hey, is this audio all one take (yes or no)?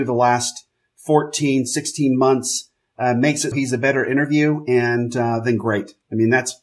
no